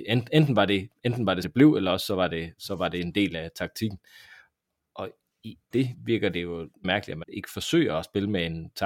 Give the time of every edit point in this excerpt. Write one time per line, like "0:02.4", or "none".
0:01.4
0:05.7
0:06.8
0:07.2